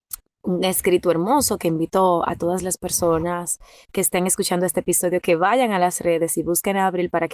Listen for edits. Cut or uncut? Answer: uncut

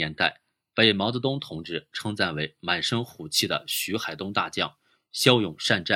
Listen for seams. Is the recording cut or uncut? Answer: uncut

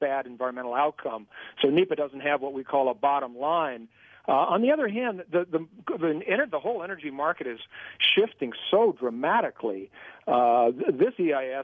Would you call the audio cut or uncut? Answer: uncut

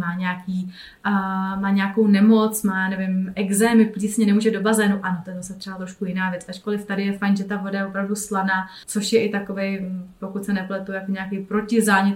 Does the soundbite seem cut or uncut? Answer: cut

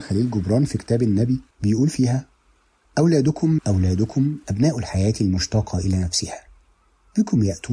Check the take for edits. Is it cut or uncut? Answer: cut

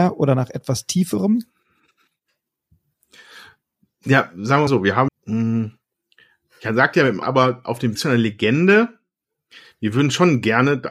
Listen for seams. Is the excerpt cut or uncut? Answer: cut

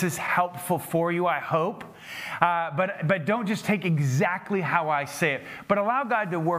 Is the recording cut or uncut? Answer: uncut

